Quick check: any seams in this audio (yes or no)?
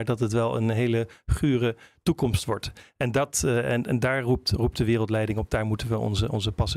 no